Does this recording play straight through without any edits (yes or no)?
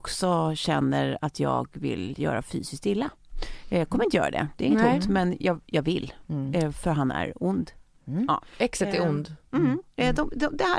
yes